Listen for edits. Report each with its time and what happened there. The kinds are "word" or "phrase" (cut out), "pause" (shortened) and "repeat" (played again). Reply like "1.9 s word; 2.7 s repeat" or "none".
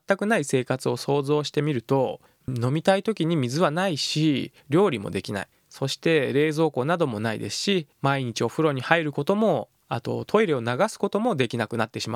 4.6 s pause; 5.5 s pause; 7.9 s pause